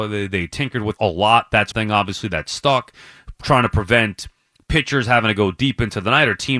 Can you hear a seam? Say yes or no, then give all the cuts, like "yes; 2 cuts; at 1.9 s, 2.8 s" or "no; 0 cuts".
yes; 2 cuts; at 1.0 s, 1.7 s